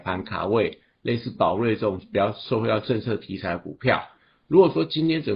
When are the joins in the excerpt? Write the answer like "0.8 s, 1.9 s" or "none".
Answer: none